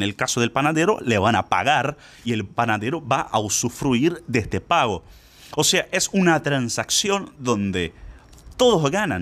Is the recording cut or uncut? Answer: uncut